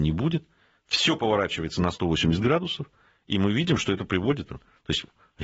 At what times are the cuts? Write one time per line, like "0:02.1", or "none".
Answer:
none